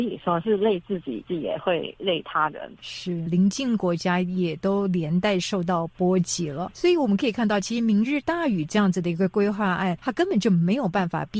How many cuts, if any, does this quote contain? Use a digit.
1